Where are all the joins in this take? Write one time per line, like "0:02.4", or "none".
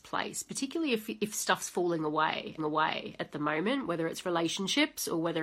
0:02.6

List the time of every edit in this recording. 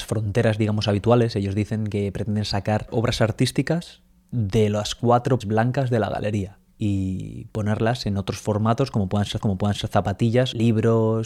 0:04.1
0:05.4
0:09.4

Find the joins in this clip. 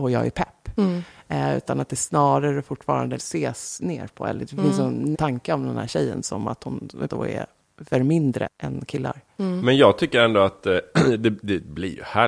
0:03.2
0:05.1
0:07.1
0:07.9
0:08.5

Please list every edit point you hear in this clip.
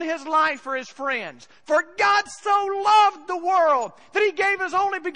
none

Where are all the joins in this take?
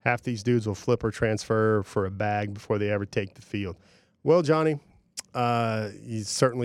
none

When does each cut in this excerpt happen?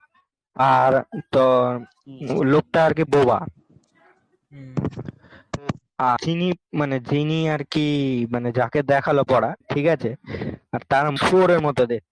0:06.2
0:09.3
0:09.6
0:11.2

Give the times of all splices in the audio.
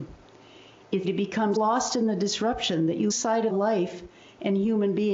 0:01.0
0:01.5
0:03.1
0:03.5

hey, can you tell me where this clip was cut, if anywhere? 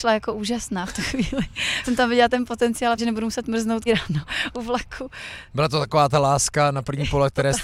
0:01.8
0:03.0
0:03.9

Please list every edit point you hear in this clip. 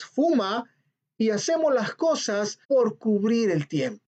0:02.6

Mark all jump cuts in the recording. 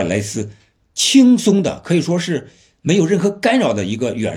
none

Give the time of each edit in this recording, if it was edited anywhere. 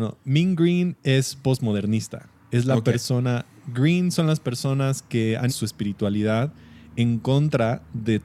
0:05.5

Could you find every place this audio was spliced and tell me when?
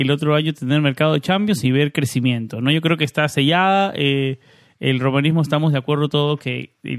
none

